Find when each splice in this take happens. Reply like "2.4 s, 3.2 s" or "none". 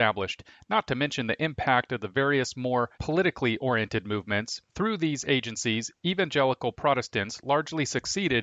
2.9 s, 4.7 s